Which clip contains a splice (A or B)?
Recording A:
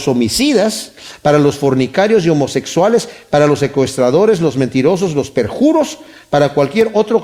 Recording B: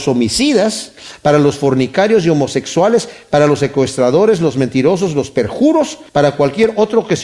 B